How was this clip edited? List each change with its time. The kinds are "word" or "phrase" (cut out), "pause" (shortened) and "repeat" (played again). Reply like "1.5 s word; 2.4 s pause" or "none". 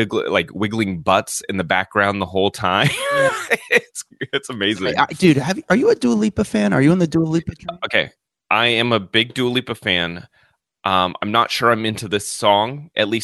none